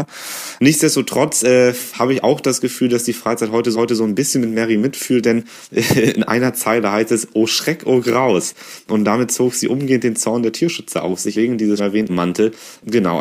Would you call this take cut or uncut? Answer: cut